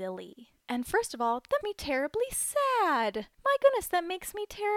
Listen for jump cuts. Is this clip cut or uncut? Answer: cut